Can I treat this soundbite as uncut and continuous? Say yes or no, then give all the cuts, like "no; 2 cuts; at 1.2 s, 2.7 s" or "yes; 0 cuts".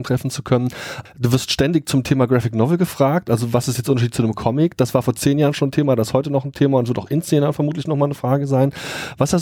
yes; 0 cuts